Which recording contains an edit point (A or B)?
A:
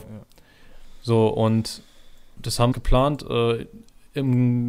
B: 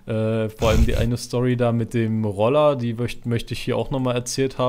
A